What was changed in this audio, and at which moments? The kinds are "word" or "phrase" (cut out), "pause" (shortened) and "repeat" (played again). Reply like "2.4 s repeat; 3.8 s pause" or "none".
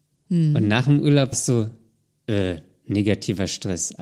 1.3 s word